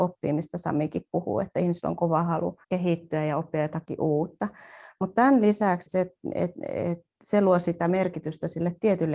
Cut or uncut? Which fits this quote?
cut